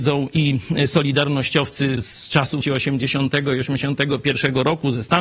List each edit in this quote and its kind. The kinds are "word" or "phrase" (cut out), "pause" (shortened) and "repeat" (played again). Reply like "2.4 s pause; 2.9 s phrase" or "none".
2.0 s word; 2.6 s word